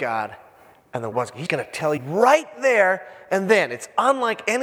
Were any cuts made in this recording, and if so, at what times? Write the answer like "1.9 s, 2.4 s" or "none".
1.1 s, 1.5 s, 2.0 s